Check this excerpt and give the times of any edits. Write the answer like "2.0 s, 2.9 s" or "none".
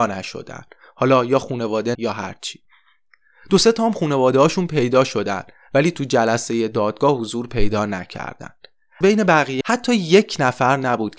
1.9 s, 9.0 s, 9.6 s